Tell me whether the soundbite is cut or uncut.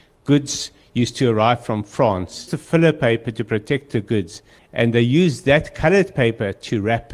cut